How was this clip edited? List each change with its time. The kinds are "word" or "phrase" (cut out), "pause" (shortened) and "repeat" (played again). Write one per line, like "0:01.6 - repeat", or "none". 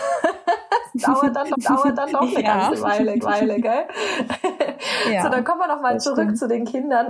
0:01.5 - repeat
0:03.2 - repeat